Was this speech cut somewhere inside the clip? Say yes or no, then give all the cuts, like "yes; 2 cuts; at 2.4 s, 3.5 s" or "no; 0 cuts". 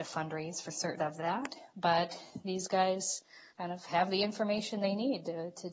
yes; 2 cuts; at 1.0 s, 3.5 s